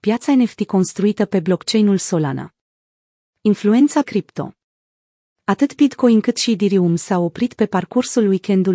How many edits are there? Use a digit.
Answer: 1